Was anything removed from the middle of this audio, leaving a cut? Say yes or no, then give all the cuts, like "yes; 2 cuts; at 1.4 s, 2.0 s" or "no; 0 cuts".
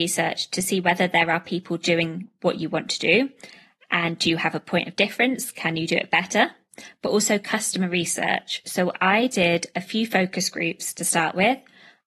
no; 0 cuts